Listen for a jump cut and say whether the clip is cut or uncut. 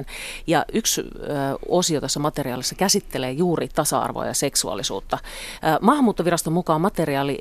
uncut